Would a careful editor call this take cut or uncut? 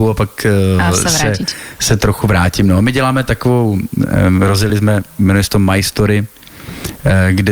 uncut